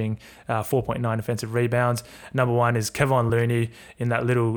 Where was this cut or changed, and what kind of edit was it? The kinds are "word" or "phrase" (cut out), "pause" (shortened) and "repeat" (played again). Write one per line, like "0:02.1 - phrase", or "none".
none